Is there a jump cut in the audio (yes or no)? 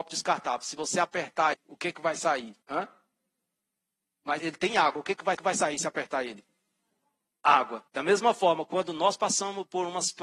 yes